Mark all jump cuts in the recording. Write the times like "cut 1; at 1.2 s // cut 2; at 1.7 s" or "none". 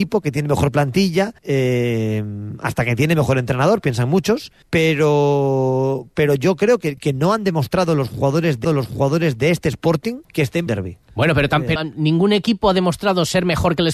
cut 1; at 1.4 s // cut 2; at 4.6 s // cut 3; at 7.0 s // cut 4; at 8.6 s // cut 5; at 10.2 s // cut 6; at 10.7 s // cut 7; at 11.0 s // cut 8; at 11.8 s